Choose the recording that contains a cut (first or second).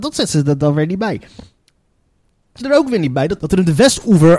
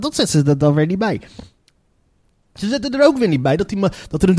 first